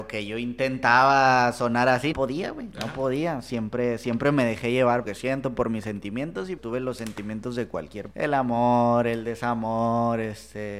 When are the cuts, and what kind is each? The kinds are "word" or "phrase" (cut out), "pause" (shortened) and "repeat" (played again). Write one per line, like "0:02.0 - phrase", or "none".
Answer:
0:02.1 - word
0:05.0 - phrase
0:06.6 - word
0:08.1 - word